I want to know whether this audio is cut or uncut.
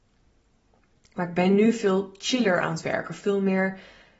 uncut